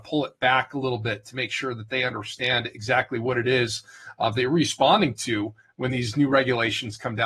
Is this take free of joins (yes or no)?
yes